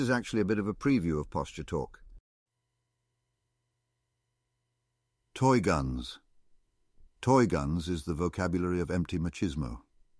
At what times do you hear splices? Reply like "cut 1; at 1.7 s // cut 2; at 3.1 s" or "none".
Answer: none